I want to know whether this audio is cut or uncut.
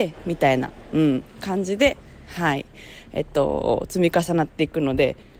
uncut